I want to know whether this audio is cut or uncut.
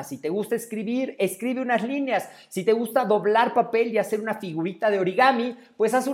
uncut